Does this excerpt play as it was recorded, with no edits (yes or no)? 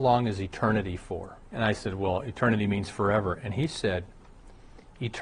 no